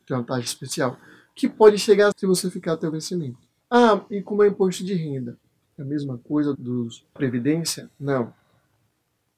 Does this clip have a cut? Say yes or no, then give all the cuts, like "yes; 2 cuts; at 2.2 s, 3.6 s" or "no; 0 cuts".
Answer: yes; 4 cuts; at 2.1 s, 3.6 s, 6.5 s, 7.2 s